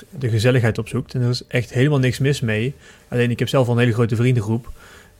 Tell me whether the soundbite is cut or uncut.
uncut